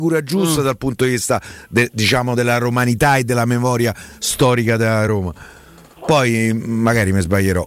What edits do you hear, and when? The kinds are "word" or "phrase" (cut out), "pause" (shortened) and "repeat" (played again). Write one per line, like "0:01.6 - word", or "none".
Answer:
none

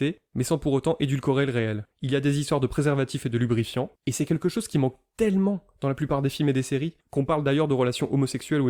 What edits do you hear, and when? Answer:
0:01.9 - pause
0:04.0 - pause
0:07.0 - pause

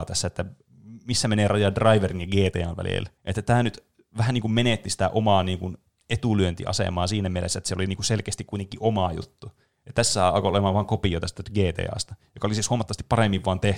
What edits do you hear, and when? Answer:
0:03.2 - pause

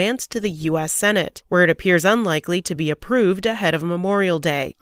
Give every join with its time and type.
none

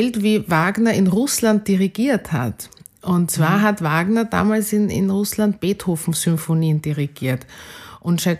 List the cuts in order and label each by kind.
none

